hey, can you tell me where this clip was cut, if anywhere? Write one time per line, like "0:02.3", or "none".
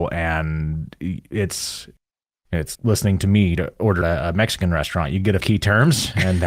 0:02.7
0:03.6
0:04.0
0:05.4